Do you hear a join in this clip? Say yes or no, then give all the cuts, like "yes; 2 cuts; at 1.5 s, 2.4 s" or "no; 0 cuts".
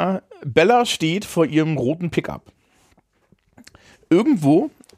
no; 0 cuts